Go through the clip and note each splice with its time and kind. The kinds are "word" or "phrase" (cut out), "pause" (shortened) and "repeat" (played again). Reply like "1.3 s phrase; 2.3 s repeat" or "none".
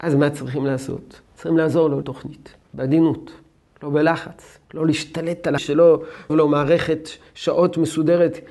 1.2 s pause; 2.0 s word; 2.6 s pause; 4.6 s pause; 5.6 s word; 6.3 s word